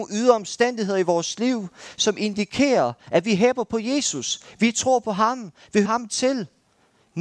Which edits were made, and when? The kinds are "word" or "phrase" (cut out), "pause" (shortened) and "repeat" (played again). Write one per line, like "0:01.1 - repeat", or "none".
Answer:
0:05.8 - word